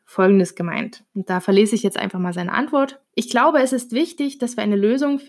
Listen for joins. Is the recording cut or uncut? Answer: cut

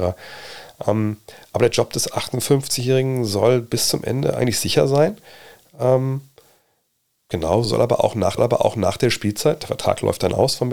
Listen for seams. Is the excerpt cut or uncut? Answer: cut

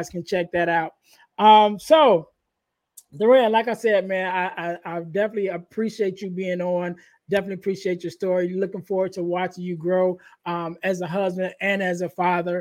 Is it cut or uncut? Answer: uncut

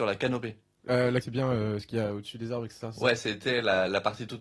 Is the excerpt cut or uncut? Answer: cut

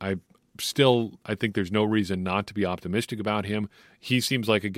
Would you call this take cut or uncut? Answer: cut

